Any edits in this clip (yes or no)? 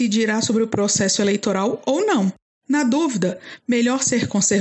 no